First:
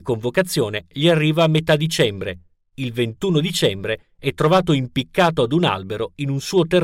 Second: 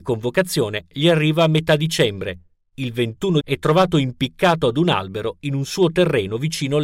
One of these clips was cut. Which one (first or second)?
second